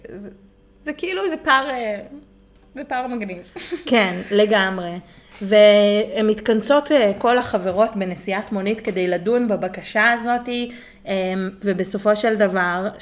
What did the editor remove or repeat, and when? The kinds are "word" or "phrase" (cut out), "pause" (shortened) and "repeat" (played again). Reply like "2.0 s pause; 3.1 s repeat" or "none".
none